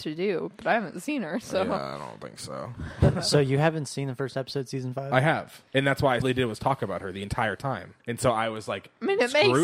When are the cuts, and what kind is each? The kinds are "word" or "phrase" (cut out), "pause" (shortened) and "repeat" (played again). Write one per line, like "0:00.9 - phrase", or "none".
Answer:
0:05.7 - pause
0:06.2 - phrase
0:08.0 - pause